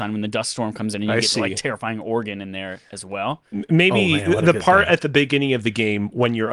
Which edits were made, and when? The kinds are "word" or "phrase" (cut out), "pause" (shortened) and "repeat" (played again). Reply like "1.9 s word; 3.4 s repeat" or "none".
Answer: none